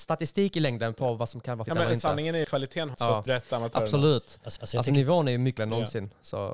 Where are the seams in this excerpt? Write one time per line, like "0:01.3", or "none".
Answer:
0:01.7
0:02.4
0:02.9
0:03.3
0:04.6
0:05.6

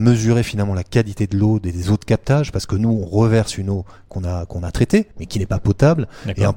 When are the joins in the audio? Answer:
0:05.1

